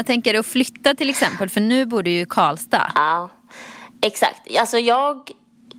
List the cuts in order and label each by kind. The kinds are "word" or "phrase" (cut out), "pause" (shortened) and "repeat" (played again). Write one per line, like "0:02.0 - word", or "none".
none